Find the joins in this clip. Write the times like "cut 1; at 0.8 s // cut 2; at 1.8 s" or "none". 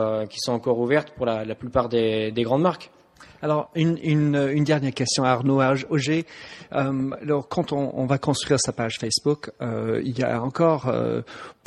none